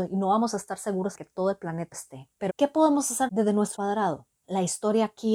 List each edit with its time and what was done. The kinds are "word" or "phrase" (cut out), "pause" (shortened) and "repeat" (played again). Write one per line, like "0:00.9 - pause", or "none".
0:01.1 - word
0:01.9 - word
0:02.5 - word
0:03.3 - word
0:03.7 - word